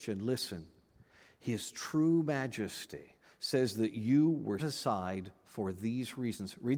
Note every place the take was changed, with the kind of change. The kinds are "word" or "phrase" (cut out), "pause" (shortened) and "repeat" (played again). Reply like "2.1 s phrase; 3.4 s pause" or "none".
3.2 s pause; 4.6 s word